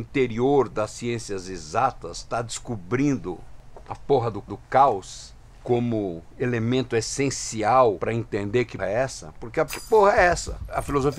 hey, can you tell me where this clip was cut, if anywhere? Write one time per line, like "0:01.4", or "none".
0:04.5
0:08.8
0:09.7